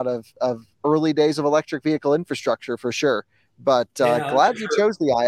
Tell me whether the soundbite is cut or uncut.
uncut